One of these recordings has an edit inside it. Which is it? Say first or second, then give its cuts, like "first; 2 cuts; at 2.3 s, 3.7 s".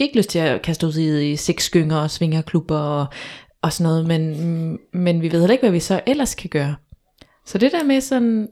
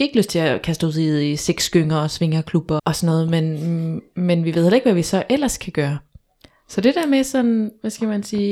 second; 1 cut; at 2.8 s